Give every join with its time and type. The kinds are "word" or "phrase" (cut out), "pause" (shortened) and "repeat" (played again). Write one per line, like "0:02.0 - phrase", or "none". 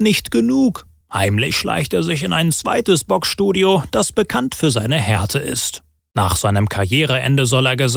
none